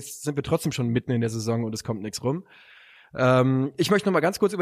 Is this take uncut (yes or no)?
yes